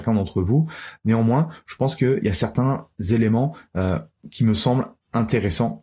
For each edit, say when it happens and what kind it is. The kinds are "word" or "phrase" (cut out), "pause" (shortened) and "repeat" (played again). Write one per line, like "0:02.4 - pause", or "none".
none